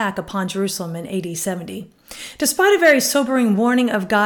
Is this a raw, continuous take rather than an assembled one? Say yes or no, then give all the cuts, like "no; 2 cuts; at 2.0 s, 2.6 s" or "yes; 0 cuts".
yes; 0 cuts